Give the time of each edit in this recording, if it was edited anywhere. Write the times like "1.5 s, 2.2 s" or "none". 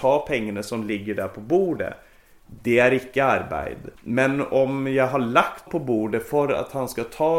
4.0 s, 5.7 s